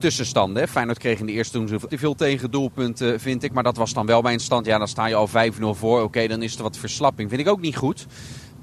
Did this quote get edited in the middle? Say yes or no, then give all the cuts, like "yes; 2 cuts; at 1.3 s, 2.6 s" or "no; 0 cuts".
yes; 1 cut; at 1.9 s